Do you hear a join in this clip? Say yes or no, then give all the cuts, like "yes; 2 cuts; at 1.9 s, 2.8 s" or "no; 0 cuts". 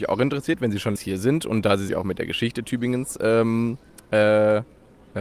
yes; 2 cuts; at 1.0 s, 1.9 s